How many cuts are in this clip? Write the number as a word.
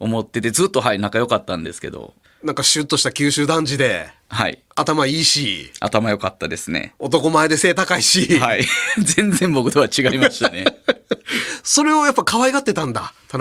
two